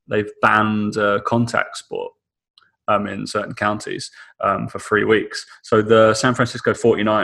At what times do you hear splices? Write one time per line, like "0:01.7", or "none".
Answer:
none